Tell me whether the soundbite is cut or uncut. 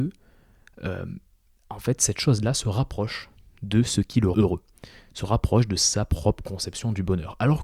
cut